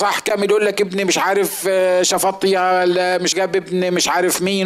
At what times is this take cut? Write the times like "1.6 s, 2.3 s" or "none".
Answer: 3.3 s